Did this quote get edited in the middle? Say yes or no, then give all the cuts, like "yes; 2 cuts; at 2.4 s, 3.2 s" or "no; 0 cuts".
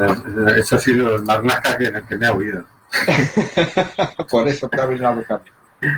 yes; 1 cut; at 4.7 s